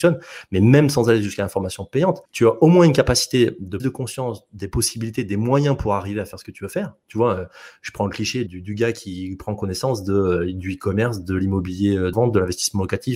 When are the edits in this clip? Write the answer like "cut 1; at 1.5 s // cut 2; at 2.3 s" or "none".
cut 1; at 2.2 s // cut 2; at 3.8 s // cut 3; at 8.5 s // cut 4; at 12.1 s